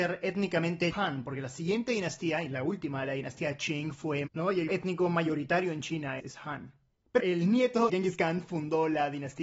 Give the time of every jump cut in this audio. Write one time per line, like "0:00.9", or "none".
0:00.9
0:04.3
0:04.7
0:06.2
0:07.2
0:07.9